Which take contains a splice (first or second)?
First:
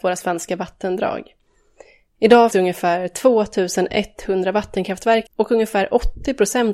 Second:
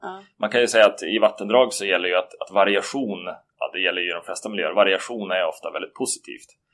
first